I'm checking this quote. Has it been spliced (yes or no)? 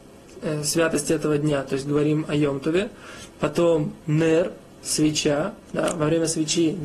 yes